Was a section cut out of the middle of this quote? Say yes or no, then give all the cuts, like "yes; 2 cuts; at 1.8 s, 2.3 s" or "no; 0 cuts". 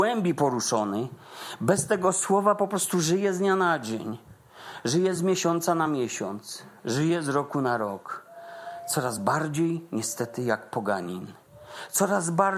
no; 0 cuts